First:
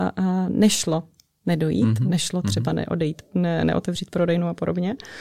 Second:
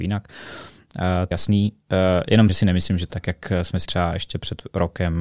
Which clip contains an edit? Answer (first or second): second